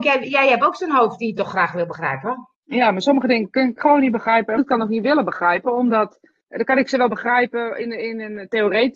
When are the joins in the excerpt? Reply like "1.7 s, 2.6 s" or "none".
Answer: 2.5 s, 3.8 s, 4.6 s, 6.4 s